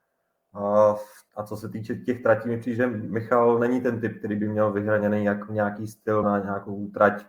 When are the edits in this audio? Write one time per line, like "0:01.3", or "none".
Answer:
0:01.3
0:06.2